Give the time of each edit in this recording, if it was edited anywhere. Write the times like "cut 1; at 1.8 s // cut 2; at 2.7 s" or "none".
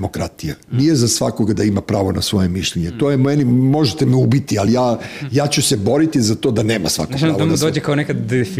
none